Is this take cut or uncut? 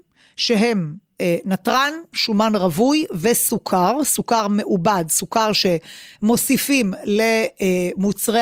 uncut